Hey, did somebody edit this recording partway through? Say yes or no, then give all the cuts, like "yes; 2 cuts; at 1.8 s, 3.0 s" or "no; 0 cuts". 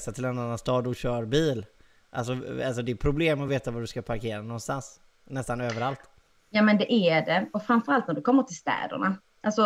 no; 0 cuts